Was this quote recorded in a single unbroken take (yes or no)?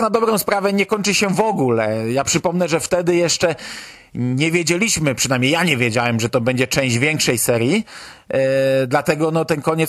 yes